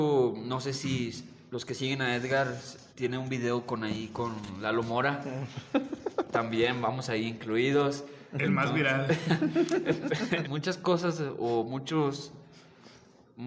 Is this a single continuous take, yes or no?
no